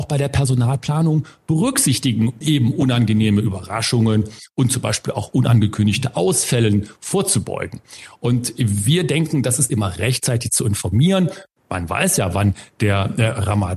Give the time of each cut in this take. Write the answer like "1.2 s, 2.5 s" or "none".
2.4 s, 9.7 s